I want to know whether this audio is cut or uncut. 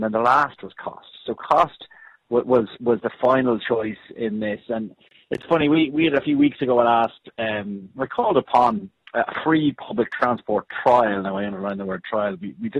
uncut